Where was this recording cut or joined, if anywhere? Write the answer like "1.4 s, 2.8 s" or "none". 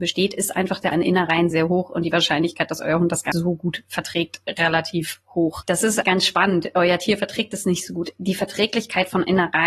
0.9 s, 1.5 s, 3.3 s, 6.0 s